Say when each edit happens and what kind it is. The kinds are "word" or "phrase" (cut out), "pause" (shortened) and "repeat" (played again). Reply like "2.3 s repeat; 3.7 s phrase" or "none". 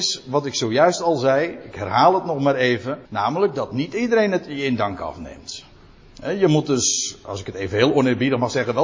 3.1 s pause

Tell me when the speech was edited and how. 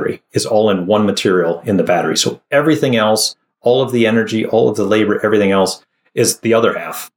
none

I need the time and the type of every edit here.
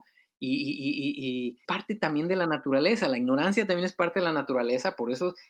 1.6 s word

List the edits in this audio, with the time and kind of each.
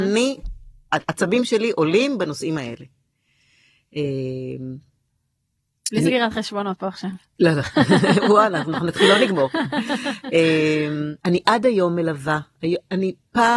11.2 s pause

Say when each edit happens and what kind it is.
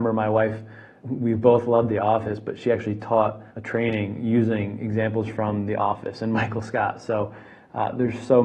1.0 s word; 3.5 s pause

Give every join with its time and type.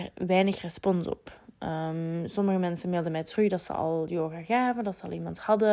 none

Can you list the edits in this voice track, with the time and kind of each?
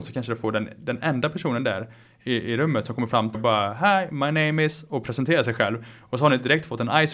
3.3 s word

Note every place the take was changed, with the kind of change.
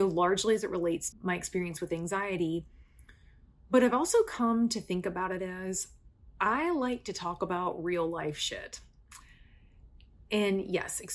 1.1 s word; 6.4 s pause

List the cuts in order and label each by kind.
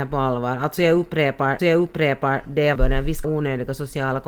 1.6 s repeat; 2.8 s phrase; 3.2 s word

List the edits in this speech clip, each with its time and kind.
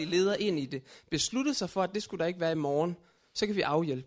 none

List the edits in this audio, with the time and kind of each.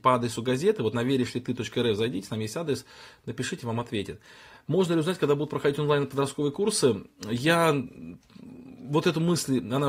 none

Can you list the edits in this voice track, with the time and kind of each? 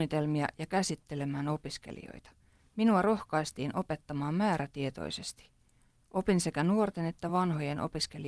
none

